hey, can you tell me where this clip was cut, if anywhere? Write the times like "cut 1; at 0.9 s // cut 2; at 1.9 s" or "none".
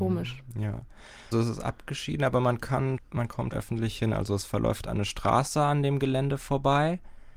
cut 1; at 1.3 s // cut 2; at 3.0 s // cut 3; at 3.5 s